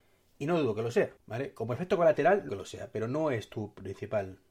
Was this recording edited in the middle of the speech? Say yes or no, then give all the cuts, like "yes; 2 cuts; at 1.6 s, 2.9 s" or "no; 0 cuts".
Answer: yes; 2 cuts; at 1.2 s, 2.5 s